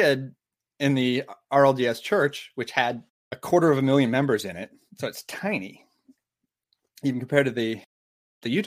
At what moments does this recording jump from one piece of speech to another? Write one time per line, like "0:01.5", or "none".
none